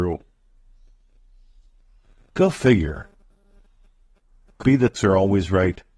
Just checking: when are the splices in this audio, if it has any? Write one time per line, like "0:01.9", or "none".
0:04.6
0:05.0